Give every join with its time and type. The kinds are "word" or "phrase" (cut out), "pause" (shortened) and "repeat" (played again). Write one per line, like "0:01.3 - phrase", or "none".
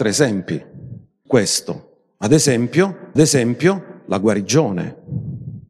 0:01.3 - word
0:03.2 - repeat